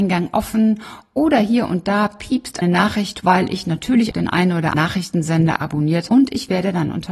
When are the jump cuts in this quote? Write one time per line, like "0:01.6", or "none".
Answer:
0:02.6
0:03.2
0:04.1
0:04.7
0:06.1